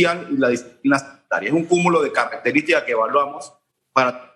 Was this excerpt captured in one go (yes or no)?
yes